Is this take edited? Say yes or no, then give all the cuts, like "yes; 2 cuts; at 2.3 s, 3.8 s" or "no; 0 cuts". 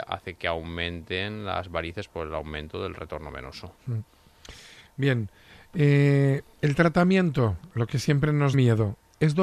yes; 2 cuts; at 3.8 s, 8.5 s